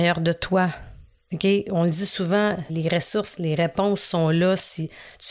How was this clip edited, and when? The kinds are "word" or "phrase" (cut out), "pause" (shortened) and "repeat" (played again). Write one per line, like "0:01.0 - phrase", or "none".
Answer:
0:02.7 - word